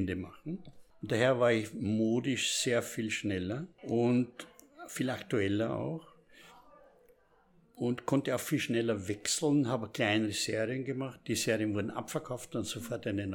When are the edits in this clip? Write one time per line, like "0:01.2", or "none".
none